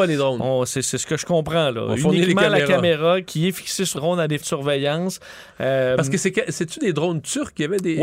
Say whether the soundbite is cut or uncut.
cut